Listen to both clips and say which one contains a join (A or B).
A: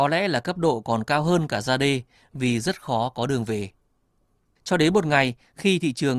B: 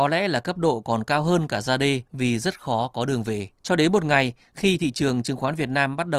B